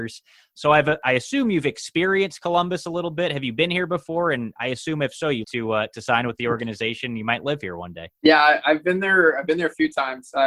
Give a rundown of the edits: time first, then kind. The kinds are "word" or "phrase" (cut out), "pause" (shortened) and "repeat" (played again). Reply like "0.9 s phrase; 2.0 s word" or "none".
5.4 s phrase; 8.1 s pause